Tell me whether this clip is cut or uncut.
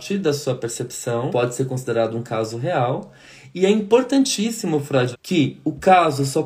cut